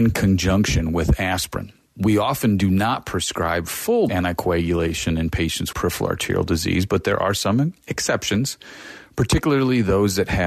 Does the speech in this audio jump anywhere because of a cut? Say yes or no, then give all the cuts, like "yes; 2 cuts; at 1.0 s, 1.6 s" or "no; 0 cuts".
yes; 2 cuts; at 4.1 s, 5.7 s